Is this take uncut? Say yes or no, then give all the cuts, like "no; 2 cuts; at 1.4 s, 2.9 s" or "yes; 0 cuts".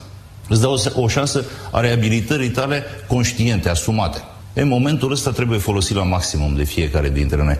yes; 0 cuts